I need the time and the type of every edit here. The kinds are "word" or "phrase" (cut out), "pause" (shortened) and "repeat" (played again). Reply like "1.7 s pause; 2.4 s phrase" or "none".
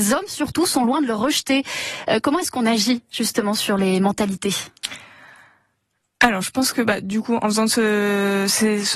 none